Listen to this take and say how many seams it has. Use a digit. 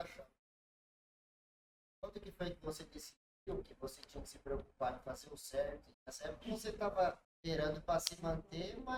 2